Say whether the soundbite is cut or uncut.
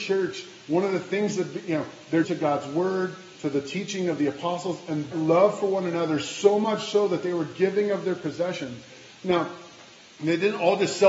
cut